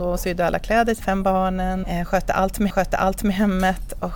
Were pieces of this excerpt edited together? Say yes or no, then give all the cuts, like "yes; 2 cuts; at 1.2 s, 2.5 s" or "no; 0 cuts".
yes; 3 cuts; at 1.0 s, 1.8 s, 2.7 s